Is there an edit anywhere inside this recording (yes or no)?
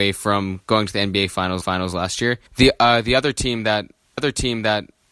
yes